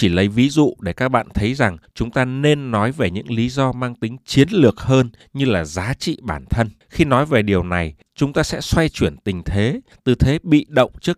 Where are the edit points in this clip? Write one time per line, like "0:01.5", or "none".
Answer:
none